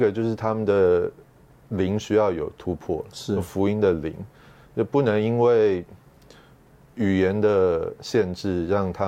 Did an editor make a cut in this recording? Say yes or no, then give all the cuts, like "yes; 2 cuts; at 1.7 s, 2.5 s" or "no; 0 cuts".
no; 0 cuts